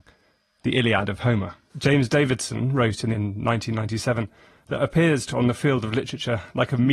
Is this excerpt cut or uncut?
cut